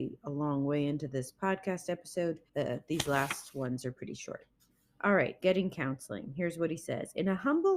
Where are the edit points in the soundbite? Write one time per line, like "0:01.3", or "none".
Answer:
0:02.5
0:04.7
0:05.4